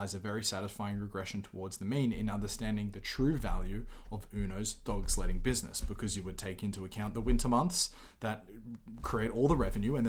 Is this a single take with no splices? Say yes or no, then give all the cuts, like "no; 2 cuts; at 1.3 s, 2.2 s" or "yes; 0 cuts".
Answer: yes; 0 cuts